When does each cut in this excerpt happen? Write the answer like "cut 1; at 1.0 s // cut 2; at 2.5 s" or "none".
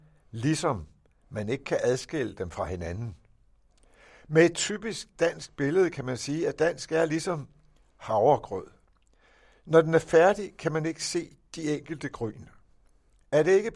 none